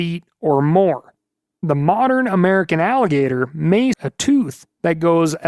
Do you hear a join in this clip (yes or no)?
yes